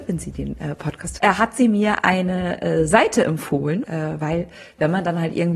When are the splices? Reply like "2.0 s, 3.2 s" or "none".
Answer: 1.2 s, 3.8 s